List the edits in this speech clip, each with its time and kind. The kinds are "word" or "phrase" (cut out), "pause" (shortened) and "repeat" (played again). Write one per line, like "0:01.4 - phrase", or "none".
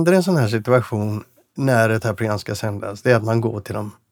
0:02.0 - word